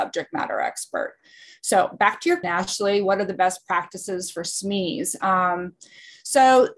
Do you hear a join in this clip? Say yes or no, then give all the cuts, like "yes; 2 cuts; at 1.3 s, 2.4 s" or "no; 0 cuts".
yes; 1 cut; at 2.4 s